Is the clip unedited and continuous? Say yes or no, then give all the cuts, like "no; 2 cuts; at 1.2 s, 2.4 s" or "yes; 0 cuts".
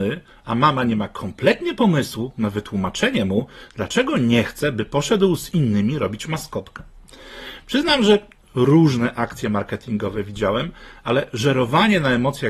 yes; 0 cuts